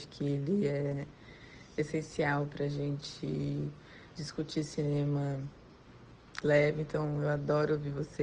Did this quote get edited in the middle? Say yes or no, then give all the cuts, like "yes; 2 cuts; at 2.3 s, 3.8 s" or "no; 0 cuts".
yes; 2 cuts; at 4.1 s, 6.4 s